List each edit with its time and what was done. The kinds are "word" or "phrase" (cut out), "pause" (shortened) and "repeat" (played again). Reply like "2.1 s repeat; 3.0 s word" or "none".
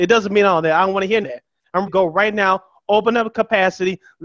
1.2 s phrase; 1.9 s word